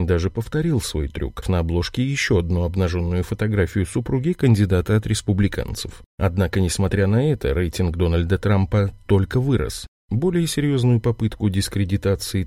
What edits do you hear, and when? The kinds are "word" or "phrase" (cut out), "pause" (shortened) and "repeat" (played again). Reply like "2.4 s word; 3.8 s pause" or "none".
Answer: 1.4 s word